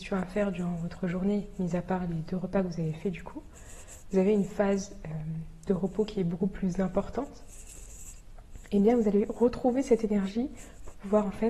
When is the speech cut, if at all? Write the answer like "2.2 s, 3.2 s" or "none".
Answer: none